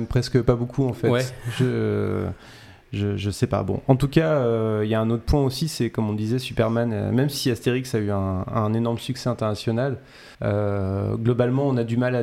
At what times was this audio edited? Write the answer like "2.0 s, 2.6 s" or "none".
10.3 s